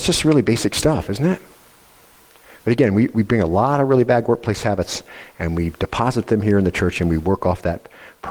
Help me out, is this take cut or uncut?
uncut